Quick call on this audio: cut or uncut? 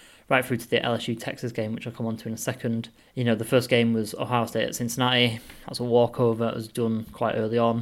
cut